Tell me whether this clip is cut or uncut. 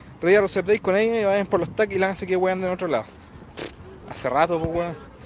uncut